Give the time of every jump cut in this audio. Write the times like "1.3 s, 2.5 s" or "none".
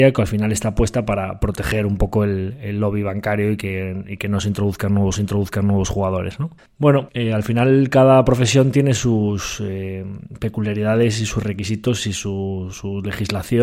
5.1 s, 6.6 s, 12.7 s

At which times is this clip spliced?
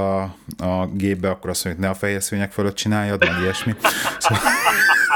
none

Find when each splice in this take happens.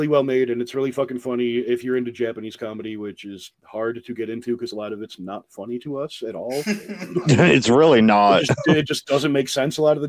3.5 s

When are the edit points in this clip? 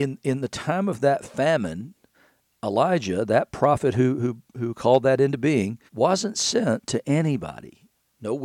2.1 s, 5.9 s

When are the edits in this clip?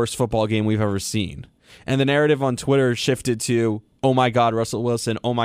none

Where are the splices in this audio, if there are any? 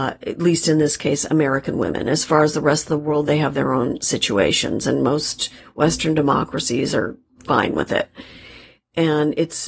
none

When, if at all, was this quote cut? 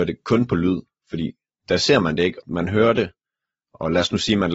2.4 s

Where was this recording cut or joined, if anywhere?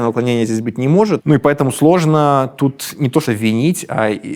3.3 s

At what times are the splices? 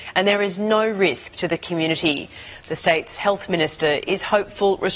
none

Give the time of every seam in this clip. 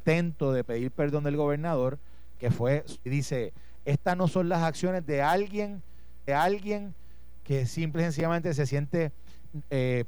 2.4 s, 3.1 s, 6.3 s

